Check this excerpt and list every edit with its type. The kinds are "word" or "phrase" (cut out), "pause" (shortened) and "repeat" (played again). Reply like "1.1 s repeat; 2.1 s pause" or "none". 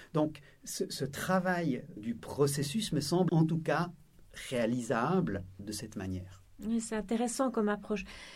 2.0 s word; 3.3 s word; 5.6 s word